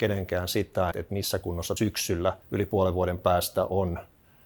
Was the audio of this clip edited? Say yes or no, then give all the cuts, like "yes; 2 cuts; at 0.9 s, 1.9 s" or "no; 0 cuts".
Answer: yes; 3 cuts; at 0.9 s, 1.8 s, 2.4 s